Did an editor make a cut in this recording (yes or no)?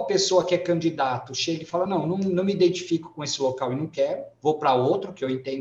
no